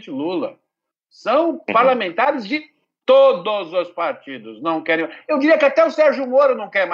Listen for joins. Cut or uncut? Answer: uncut